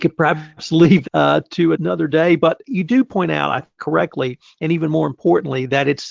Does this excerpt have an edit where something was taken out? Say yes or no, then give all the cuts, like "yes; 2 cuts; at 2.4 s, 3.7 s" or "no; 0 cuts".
yes; 4 cuts; at 1.0 s, 1.7 s, 2.6 s, 3.8 s